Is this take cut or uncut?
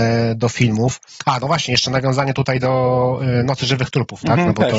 uncut